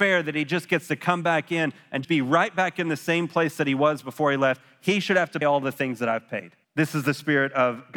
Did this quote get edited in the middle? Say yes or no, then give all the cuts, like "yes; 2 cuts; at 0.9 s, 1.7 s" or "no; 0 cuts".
yes; 3 cuts; at 2.0 s, 5.4 s, 6.6 s